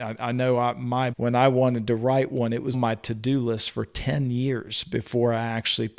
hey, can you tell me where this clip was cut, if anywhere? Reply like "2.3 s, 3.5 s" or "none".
1.1 s, 2.7 s